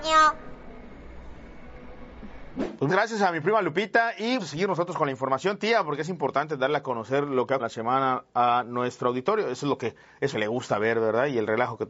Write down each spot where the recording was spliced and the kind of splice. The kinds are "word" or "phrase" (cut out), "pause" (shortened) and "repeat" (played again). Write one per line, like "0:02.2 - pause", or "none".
0:02.9 - word
0:04.4 - word
0:07.6 - word
0:10.3 - word